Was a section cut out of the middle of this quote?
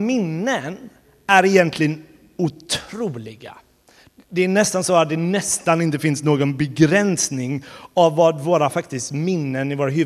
no; 0 cuts

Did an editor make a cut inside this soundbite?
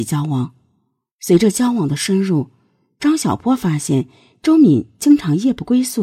no; 0 cuts

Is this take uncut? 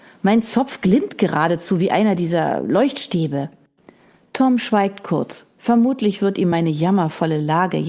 yes; 0 cuts

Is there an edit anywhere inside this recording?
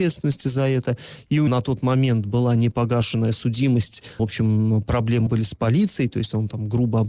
yes; 3 cuts; at 1.5 s, 4.2 s, 5.3 s

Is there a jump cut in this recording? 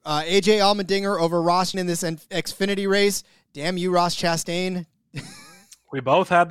yes; 2 cuts; at 1.7 s, 3.3 s

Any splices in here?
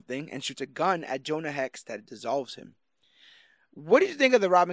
no; 0 cuts

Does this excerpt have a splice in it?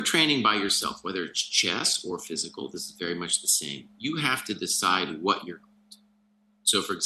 no; 0 cuts

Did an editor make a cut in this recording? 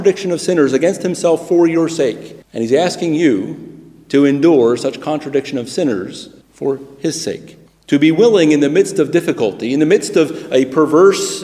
yes; 3 cuts; at 2.4 s, 6.4 s, 7.7 s

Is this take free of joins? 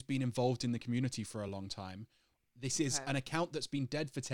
yes; 0 cuts

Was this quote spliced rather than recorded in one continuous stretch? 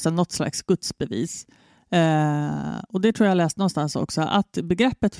no; 0 cuts

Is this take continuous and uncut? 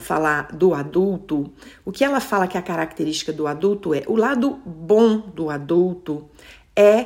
yes; 0 cuts

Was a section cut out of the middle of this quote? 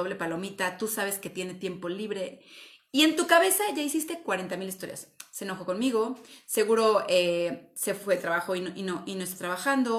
no; 0 cuts

